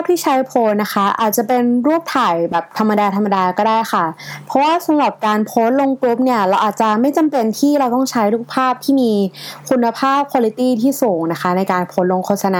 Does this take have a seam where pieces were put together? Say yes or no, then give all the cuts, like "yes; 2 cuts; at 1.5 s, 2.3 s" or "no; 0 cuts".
no; 0 cuts